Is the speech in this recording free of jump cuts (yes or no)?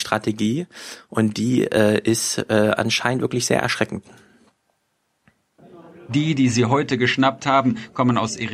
yes